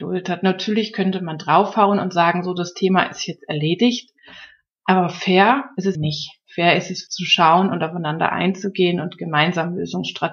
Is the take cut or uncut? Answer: cut